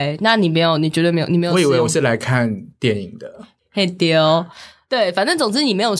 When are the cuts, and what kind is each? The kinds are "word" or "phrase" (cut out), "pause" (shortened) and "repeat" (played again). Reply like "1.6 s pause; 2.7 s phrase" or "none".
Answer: none